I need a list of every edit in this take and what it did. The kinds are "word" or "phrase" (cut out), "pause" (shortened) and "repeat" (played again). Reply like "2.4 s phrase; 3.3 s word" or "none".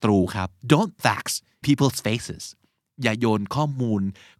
1.0 s word; 1.6 s word